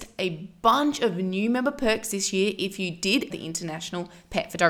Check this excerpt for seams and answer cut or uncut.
cut